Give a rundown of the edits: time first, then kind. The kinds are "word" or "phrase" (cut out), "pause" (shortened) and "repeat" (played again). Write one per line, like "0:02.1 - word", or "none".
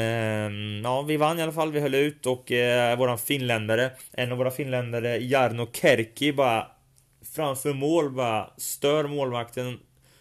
none